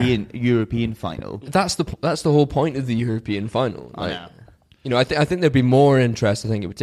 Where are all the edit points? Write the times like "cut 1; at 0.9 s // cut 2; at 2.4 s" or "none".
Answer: none